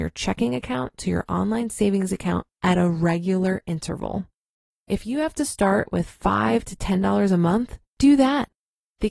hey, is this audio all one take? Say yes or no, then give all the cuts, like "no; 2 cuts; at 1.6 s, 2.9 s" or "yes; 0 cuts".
yes; 0 cuts